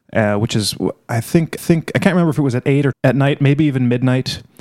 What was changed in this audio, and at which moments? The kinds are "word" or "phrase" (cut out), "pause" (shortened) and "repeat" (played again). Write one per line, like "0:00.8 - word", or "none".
0:01.6 - repeat
0:02.9 - word